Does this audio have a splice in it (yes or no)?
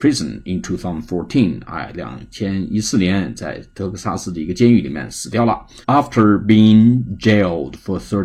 yes